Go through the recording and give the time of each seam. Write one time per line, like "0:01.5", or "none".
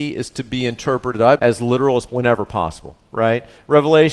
0:01.4
0:02.1